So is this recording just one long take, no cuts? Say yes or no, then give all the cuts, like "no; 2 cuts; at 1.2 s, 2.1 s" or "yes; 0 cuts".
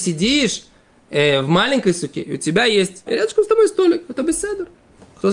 no; 1 cut; at 3.1 s